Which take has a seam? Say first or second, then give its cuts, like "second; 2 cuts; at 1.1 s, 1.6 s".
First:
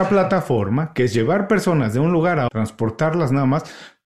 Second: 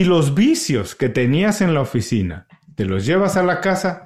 first; 1 cut; at 2.5 s